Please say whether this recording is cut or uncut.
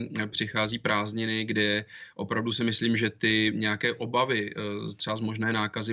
uncut